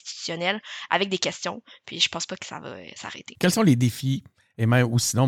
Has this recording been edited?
no; 0 cuts

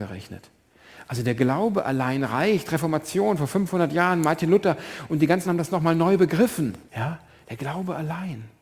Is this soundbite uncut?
no; 2 cuts; at 5.4 s, 6.9 s

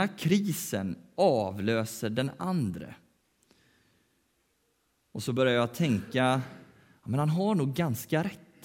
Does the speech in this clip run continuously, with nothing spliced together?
yes; 0 cuts

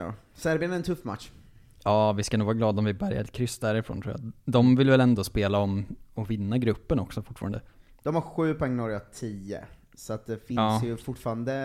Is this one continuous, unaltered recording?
yes; 0 cuts

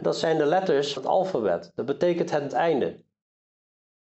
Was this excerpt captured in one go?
no; 2 cuts; at 1.0 s, 2.5 s

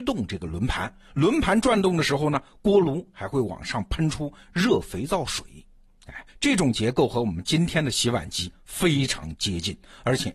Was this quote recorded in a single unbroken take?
no; 1 cut; at 6.3 s

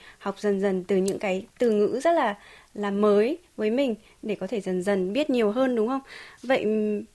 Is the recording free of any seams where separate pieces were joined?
yes; 0 cuts

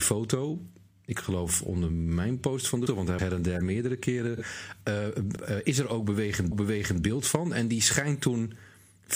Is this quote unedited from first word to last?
no; 4 cuts; at 2.9 s, 3.2 s, 5.4 s, 6.5 s

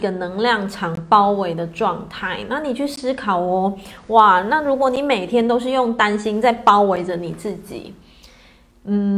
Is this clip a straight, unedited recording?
yes; 0 cuts

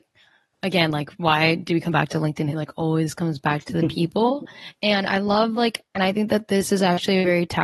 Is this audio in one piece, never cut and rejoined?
yes; 0 cuts

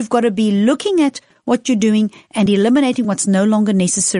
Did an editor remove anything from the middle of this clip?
no; 0 cuts

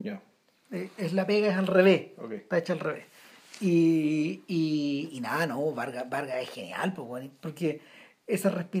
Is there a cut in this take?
no; 0 cuts

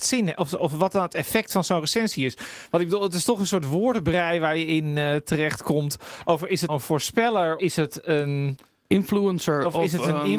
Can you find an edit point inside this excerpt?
yes; 2 cuts; at 6.7 s, 7.6 s

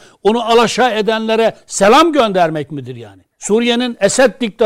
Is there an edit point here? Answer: yes; 1 cut; at 3.3 s

